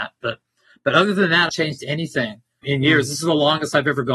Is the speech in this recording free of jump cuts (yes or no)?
no